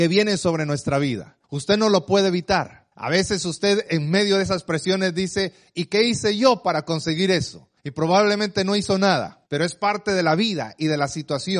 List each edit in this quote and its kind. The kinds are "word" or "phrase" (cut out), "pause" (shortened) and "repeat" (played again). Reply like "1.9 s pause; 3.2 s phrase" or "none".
1.4 s pause; 2.9 s pause; 7.8 s pause; 9.5 s pause